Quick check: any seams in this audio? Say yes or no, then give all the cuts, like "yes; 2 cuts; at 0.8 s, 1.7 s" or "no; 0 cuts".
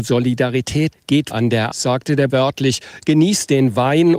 yes; 4 cuts; at 0.9 s, 1.3 s, 1.7 s, 2.3 s